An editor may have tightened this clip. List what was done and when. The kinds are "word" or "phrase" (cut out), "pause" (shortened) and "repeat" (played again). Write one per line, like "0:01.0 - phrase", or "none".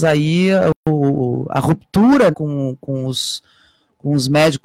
0:02.3 - word